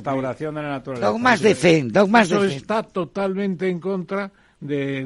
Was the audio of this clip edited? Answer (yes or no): no